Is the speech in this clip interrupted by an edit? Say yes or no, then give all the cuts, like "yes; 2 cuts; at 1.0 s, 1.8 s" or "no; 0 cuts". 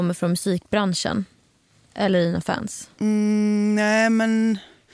no; 0 cuts